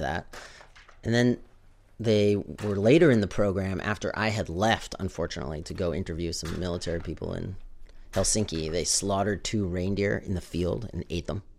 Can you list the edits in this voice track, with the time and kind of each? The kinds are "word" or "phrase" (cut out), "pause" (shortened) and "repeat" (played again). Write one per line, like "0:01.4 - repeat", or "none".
none